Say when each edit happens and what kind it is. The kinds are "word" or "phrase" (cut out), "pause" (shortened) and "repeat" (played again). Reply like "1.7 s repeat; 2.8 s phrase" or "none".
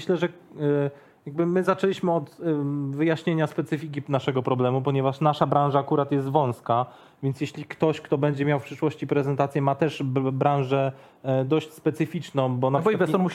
none